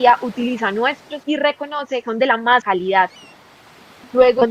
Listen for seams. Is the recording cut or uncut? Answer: cut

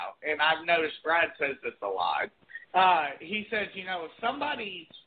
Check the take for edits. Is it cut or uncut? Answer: cut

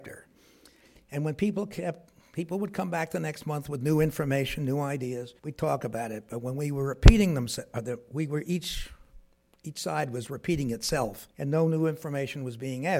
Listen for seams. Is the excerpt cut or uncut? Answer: cut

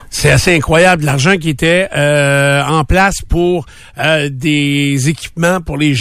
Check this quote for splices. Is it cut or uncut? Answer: uncut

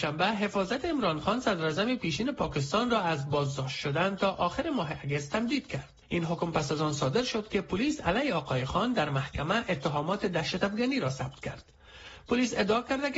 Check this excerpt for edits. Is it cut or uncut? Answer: cut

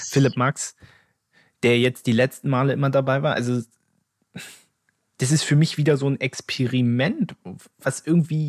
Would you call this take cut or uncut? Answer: uncut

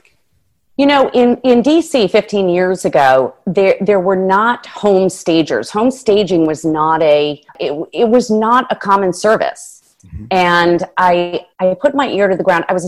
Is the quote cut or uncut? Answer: cut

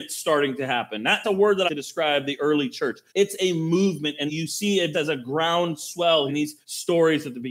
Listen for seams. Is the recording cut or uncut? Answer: cut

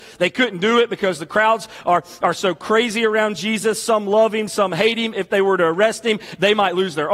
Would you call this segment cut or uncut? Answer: uncut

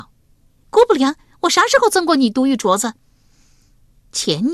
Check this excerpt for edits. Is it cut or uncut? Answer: uncut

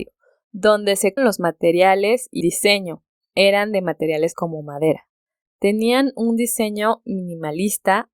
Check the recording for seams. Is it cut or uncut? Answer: cut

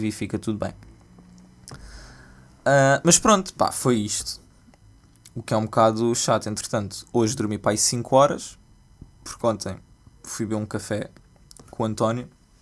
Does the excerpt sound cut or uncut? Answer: uncut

